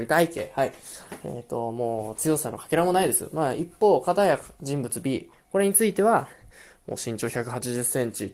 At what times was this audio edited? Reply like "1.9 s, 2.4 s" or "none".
none